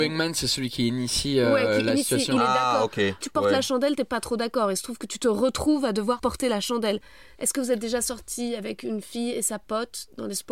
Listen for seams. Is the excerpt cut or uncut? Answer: cut